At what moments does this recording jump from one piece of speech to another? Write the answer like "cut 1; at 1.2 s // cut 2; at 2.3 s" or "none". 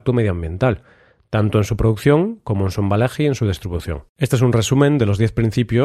cut 1; at 4.1 s